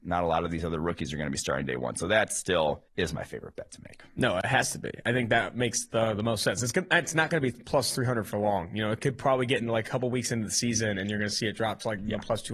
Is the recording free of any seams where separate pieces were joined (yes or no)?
no